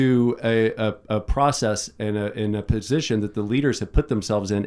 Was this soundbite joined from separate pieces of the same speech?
no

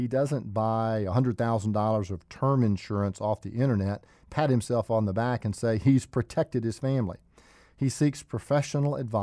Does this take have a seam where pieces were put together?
no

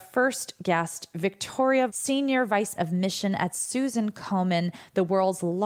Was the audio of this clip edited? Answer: yes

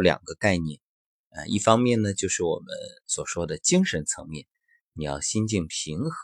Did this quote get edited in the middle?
no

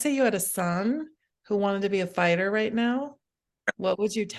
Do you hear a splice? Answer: no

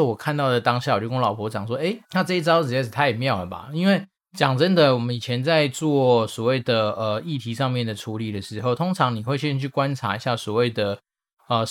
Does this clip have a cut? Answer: yes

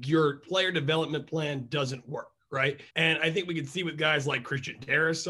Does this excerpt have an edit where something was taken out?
yes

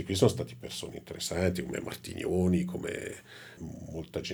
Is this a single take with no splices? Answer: yes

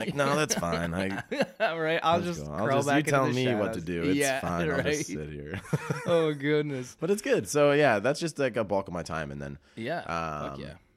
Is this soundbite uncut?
yes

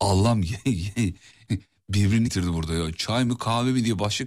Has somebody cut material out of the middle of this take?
yes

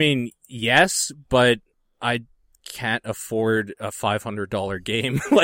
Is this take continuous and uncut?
yes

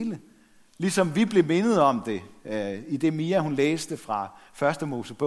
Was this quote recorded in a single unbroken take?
yes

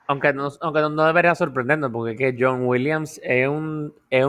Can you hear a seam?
no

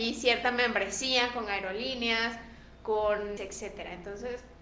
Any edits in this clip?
yes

